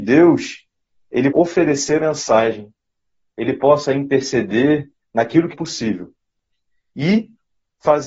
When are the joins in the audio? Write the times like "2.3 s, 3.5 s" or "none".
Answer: 1.3 s, 2.0 s, 5.5 s